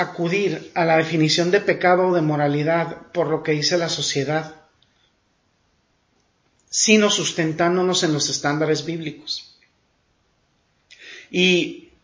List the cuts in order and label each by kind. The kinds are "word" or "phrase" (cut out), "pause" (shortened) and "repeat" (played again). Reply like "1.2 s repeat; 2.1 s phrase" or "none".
none